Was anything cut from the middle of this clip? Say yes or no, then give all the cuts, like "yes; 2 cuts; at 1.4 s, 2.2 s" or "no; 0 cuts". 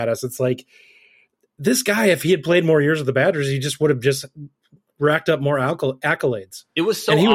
no; 0 cuts